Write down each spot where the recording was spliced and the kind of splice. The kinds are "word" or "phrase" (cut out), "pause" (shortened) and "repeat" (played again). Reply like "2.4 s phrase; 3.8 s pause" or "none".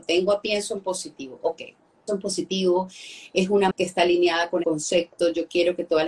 2.1 s word; 3.7 s word; 4.6 s word